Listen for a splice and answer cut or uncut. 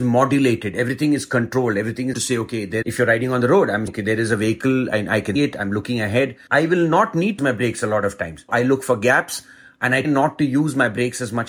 cut